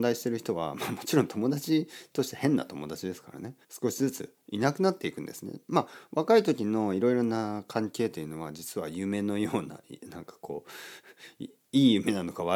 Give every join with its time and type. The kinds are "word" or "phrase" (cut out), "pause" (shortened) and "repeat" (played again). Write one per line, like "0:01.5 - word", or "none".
0:03.6 - pause